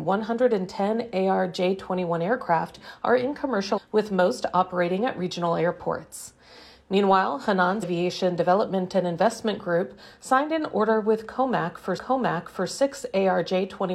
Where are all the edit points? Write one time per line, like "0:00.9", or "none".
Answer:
0:03.8
0:07.8
0:12.0